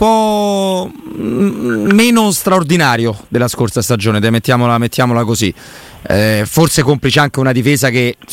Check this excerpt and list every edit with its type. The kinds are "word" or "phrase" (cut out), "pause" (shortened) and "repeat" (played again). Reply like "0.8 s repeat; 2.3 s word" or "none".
none